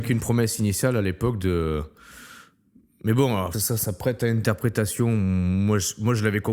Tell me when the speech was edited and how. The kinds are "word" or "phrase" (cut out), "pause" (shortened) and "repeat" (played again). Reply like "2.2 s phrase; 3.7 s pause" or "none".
3.5 s word; 3.8 s word